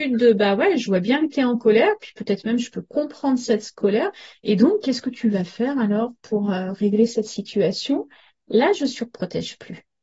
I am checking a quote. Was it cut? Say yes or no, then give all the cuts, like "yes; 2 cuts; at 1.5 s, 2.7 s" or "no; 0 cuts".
no; 0 cuts